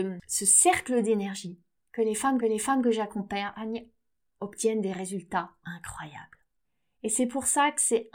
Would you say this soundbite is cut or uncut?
cut